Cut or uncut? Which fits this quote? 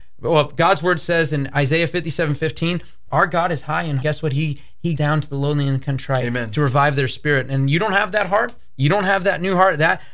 cut